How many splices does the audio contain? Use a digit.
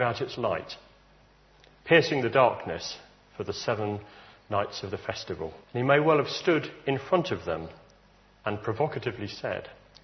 1